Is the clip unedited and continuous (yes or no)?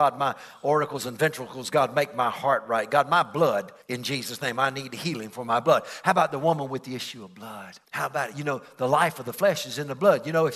no